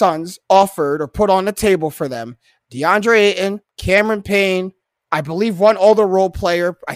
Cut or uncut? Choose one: cut